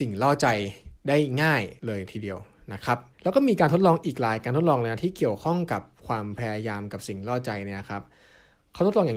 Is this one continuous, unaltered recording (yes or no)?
no